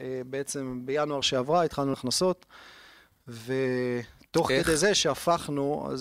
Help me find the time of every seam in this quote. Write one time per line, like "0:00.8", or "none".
0:01.2
0:01.9